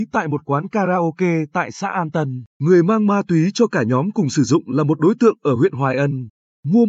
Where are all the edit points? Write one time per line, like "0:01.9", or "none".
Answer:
0:02.5